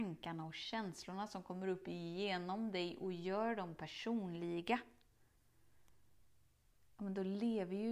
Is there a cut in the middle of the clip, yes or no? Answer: no